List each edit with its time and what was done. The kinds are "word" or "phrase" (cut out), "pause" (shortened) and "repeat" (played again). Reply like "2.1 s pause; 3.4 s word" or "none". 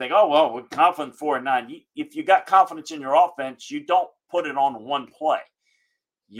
none